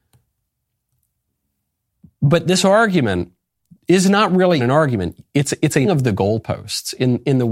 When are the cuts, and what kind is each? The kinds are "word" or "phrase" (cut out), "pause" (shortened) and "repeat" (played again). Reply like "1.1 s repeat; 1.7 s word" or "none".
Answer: 4.6 s word; 5.8 s word